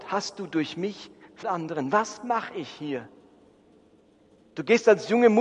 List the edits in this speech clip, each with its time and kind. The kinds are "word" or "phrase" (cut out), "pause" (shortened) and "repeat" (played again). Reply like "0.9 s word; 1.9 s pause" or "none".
1.4 s word